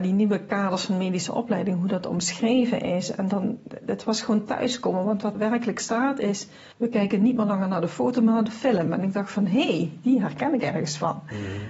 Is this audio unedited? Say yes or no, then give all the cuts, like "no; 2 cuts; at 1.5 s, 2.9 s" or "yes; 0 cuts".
no; 2 cuts; at 5.3 s, 6.7 s